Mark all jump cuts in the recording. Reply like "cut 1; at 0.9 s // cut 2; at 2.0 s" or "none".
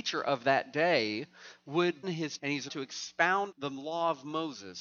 cut 1; at 2.0 s // cut 2; at 2.4 s // cut 3; at 2.7 s // cut 4; at 3.5 s